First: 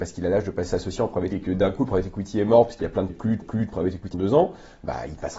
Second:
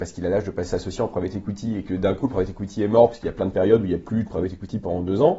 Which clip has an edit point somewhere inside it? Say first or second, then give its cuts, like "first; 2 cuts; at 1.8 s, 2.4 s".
first; 4 cuts; at 1.3 s, 3.1 s, 3.4 s, 4.1 s